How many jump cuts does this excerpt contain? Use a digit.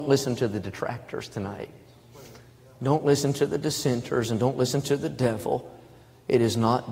0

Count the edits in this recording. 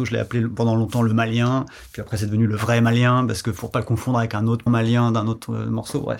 1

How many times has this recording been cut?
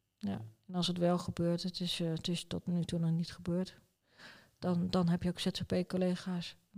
0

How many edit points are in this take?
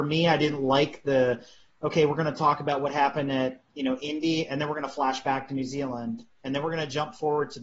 0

